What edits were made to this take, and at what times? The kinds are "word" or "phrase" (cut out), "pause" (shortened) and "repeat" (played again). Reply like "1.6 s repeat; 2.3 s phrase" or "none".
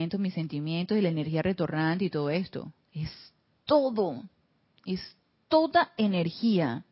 2.8 s pause